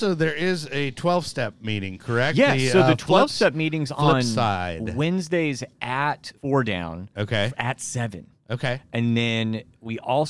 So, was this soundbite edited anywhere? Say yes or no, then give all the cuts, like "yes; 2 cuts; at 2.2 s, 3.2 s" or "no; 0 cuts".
yes; 1 cut; at 6.4 s